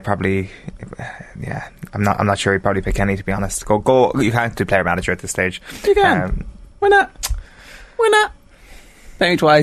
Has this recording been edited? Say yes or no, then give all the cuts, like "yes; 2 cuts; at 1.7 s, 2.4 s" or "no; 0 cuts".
no; 0 cuts